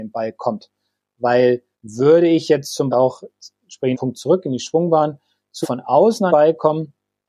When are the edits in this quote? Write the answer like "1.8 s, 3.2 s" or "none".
1.7 s, 2.9 s, 3.9 s, 5.6 s, 6.3 s